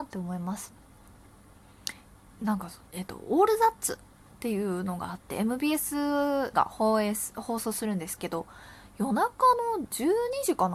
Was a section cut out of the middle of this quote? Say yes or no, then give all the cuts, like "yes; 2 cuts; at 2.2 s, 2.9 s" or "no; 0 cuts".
yes; 1 cut; at 6.5 s